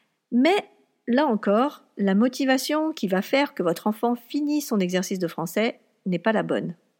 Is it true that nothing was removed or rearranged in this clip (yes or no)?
yes